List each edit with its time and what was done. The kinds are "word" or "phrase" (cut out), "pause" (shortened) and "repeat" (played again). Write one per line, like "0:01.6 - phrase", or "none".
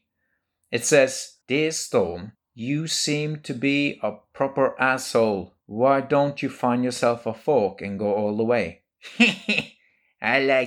0:01.4 - pause
0:02.4 - pause
0:05.6 - pause